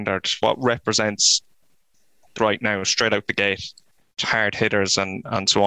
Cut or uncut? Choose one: cut